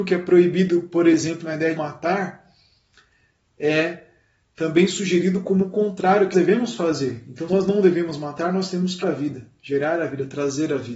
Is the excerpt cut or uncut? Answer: cut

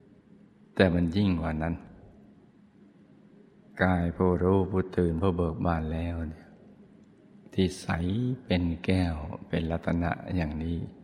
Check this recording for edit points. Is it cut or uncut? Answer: uncut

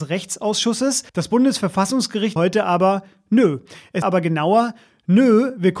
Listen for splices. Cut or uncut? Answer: cut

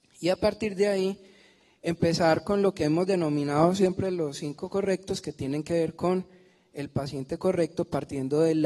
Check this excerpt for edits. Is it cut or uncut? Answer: uncut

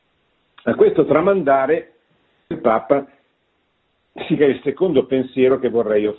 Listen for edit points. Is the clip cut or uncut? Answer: cut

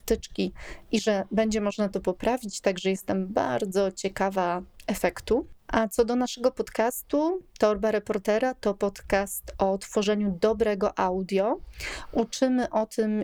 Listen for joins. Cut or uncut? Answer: cut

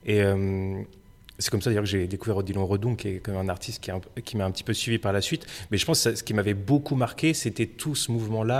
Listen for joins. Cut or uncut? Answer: uncut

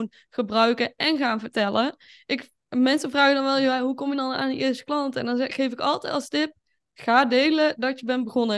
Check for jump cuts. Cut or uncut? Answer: uncut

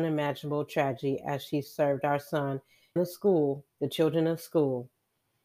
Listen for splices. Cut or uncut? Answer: cut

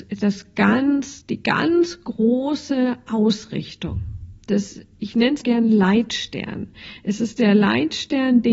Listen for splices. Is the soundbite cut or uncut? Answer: cut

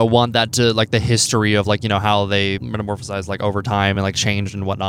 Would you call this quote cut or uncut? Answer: uncut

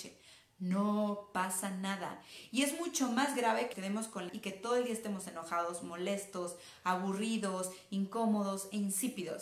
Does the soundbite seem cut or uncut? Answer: cut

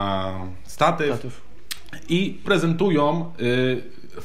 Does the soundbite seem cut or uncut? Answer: cut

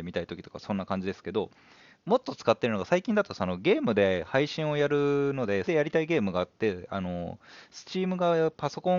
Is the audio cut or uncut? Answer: cut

